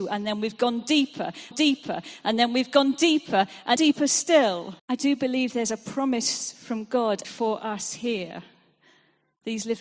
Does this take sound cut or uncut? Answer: cut